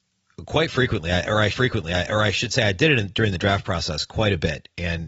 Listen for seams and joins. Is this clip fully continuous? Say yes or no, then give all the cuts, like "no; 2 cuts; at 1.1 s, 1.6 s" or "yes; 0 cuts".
no; 1 cut; at 1.5 s